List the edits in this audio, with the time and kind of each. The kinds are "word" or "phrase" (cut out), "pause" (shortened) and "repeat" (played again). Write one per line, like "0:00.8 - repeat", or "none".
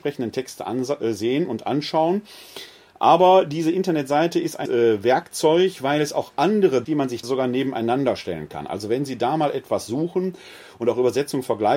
0:04.6 - word
0:06.8 - phrase
0:07.2 - word